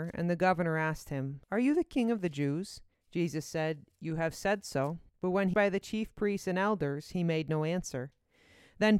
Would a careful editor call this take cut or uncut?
cut